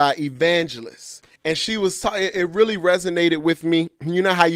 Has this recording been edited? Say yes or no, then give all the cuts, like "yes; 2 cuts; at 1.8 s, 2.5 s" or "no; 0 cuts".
yes; 1 cut; at 1.4 s